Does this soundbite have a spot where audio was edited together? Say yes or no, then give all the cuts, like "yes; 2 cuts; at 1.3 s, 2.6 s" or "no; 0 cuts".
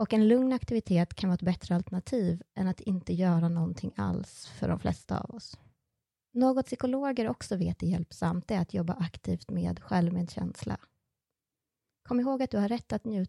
yes; 1 cut; at 6.6 s